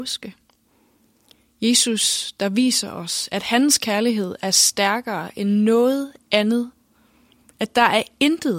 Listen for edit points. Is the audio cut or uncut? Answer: uncut